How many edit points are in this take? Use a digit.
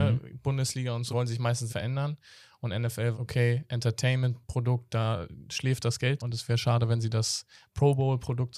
4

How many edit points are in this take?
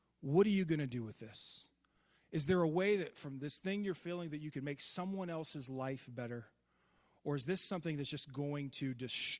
0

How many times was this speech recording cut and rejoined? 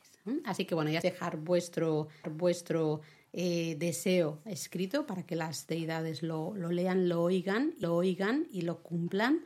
3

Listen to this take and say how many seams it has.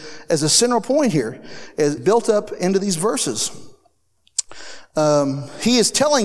1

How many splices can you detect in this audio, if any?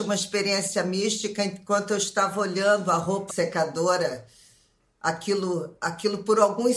1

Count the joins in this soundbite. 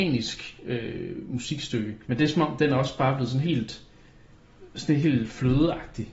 2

